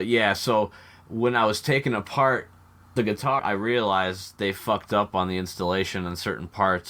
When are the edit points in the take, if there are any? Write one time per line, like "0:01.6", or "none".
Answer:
0:03.0
0:03.4